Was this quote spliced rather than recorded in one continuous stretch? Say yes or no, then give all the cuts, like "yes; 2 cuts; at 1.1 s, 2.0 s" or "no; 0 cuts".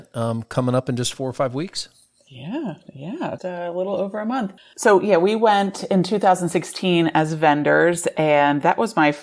yes; 2 cuts; at 3.4 s, 4.6 s